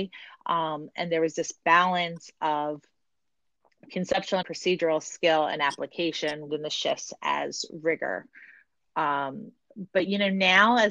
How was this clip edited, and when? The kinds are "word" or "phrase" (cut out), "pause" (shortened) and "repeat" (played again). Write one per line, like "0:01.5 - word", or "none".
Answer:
0:04.4 - word
0:06.5 - phrase